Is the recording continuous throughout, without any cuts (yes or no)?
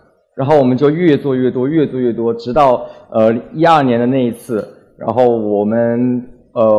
yes